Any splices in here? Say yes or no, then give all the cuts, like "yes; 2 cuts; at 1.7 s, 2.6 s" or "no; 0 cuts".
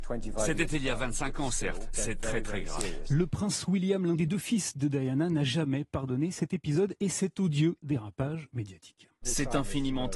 yes; 1 cut; at 1.9 s